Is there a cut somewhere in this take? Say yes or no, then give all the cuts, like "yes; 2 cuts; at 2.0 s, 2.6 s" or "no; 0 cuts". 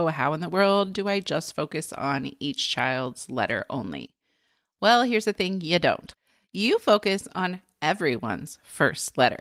no; 0 cuts